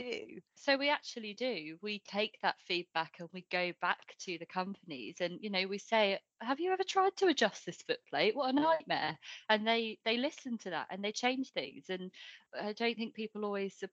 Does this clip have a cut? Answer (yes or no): no